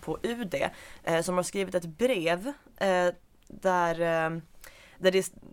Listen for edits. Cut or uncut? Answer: uncut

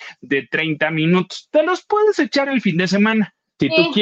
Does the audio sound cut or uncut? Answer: uncut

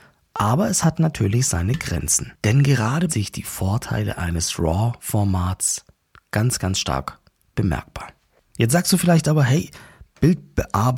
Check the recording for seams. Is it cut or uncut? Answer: cut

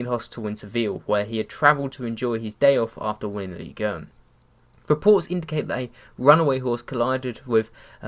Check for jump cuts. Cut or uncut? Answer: uncut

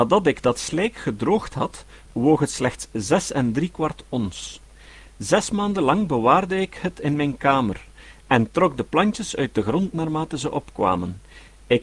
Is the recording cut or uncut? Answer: uncut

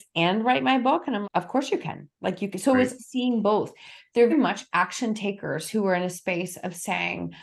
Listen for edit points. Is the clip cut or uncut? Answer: cut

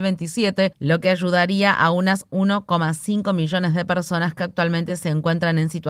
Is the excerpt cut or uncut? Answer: uncut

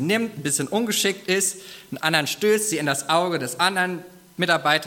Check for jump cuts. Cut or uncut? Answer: uncut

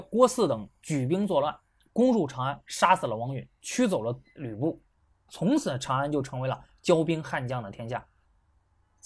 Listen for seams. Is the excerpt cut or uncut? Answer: uncut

